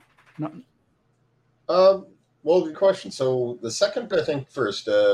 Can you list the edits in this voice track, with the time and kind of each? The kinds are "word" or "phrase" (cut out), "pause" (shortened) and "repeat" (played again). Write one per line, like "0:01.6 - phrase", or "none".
0:02.7 - word
0:04.1 - word